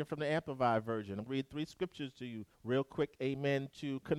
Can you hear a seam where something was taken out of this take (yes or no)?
yes